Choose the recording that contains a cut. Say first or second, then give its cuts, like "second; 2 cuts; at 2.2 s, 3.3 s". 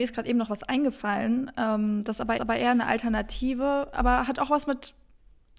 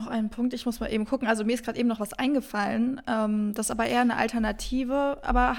first; 1 cut; at 2.4 s